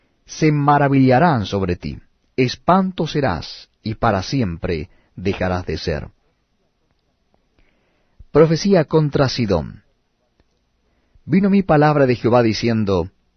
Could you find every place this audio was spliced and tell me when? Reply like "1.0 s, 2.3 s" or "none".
none